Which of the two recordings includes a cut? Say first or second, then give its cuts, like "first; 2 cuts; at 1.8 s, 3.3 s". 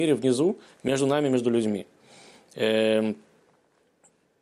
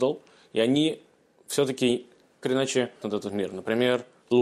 second; 2 cuts; at 2.4 s, 3.0 s